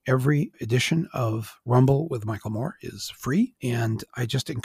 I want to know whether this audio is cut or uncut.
uncut